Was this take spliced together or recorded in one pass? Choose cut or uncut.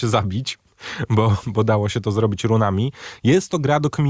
uncut